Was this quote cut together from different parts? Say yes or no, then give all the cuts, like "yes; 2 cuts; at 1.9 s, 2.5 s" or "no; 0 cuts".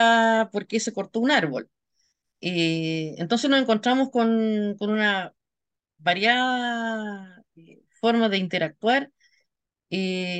no; 0 cuts